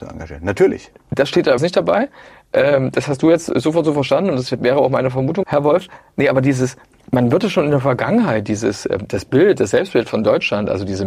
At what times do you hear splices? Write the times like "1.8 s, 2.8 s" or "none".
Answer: 1.6 s, 5.4 s